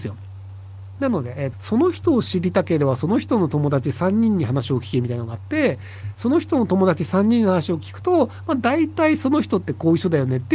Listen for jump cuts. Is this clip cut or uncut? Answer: cut